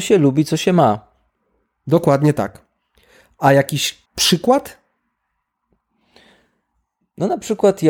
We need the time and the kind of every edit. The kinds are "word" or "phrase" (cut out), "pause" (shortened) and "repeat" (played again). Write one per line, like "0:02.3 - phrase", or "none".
0:04.1 - pause